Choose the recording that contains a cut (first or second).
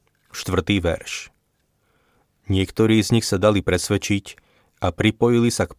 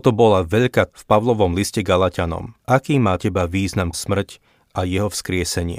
second